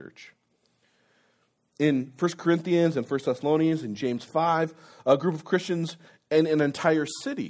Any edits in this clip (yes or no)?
no